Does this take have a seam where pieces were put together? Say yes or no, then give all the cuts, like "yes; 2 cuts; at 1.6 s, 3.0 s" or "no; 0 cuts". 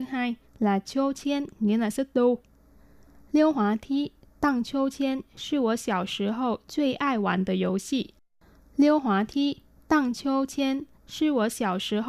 no; 0 cuts